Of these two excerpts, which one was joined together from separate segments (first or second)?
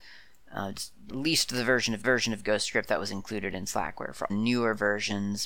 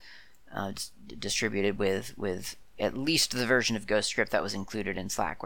first